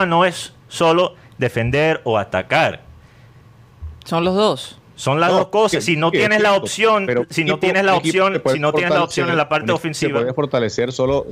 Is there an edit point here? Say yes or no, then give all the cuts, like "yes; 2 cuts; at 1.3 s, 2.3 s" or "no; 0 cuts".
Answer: no; 0 cuts